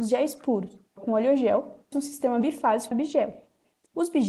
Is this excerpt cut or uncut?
cut